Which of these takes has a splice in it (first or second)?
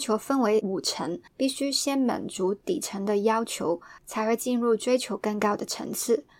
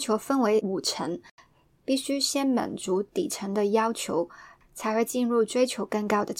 first